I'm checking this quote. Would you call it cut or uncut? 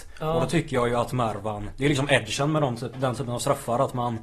uncut